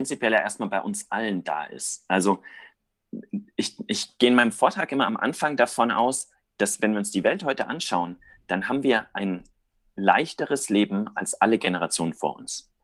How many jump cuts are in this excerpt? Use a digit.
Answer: 0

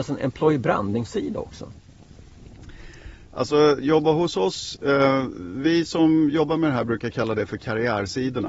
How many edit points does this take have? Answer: 0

